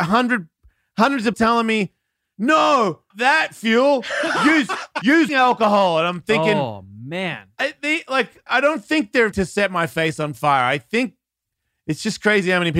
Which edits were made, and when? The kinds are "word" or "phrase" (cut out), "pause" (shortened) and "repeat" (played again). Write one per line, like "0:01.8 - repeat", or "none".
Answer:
0:01.3 - word
0:03.1 - word
0:05.3 - word
0:08.5 - word
0:09.3 - word